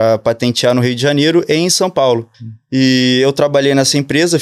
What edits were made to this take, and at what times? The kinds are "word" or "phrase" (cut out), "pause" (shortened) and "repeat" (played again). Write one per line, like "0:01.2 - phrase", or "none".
0:02.3 - pause